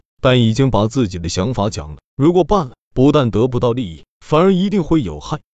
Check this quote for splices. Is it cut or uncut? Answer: uncut